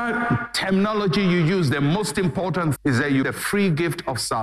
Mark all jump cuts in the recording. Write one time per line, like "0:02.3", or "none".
0:02.8
0:03.2